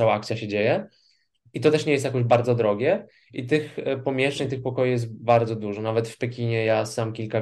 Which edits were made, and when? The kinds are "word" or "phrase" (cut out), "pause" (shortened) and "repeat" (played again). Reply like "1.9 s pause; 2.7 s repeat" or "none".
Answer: none